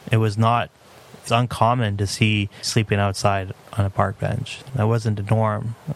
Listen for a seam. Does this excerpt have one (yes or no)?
yes